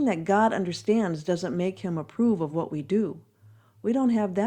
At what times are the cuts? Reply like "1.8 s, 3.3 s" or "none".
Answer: none